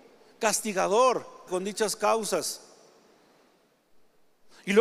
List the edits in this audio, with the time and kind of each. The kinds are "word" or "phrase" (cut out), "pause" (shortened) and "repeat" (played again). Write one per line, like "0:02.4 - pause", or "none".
0:01.5 - word